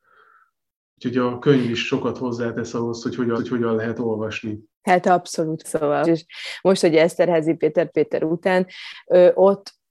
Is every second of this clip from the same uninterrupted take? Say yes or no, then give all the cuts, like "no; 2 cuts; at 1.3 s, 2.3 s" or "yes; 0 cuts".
no; 5 cuts; at 3.4 s, 4.7 s, 5.6 s, 6.0 s, 7.9 s